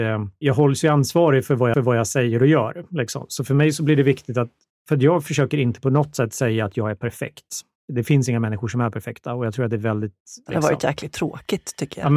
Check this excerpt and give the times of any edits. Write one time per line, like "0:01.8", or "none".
0:01.7